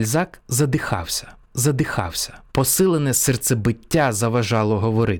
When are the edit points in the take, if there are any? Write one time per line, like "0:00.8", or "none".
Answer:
0:01.5